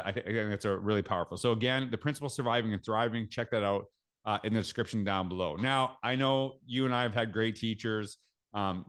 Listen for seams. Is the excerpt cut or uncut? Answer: uncut